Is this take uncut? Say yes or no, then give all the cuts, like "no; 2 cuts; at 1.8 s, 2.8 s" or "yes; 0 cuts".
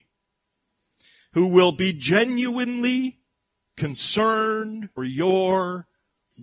no; 1 cut; at 5.0 s